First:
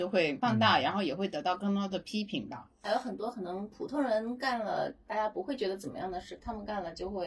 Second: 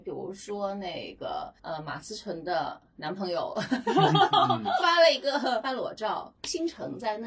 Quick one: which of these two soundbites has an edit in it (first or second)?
second